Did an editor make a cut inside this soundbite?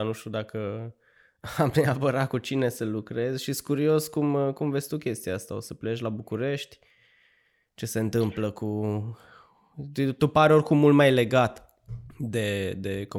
no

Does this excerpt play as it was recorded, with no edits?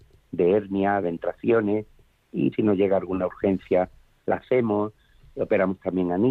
no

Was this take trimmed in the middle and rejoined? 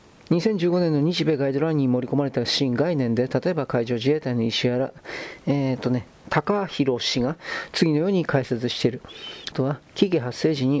yes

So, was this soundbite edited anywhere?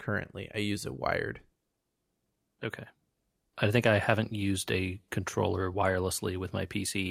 no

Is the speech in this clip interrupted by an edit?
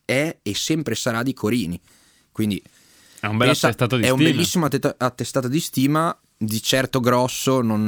no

